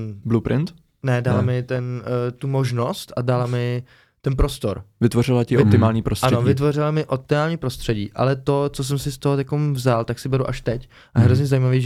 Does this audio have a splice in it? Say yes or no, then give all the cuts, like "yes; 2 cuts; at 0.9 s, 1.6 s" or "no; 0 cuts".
no; 0 cuts